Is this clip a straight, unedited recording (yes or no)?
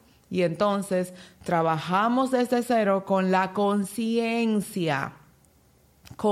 yes